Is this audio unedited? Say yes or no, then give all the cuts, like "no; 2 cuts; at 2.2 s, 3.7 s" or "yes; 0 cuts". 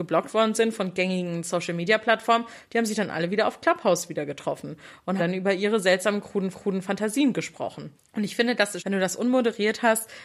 no; 4 cuts; at 5.2 s, 6.5 s, 8.0 s, 8.8 s